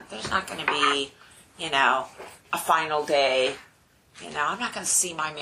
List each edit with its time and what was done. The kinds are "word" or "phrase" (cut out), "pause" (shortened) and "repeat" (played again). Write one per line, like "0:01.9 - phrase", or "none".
0:02.4 - pause